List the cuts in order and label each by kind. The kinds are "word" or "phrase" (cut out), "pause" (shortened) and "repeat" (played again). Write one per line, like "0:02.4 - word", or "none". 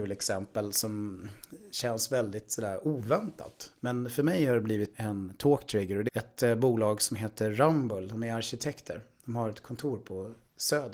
0:04.9 - word
0:06.1 - word